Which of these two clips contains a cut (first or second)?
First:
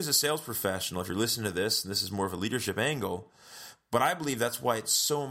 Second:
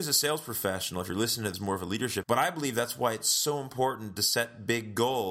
second